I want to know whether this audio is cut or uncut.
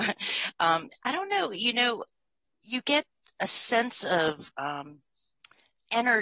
uncut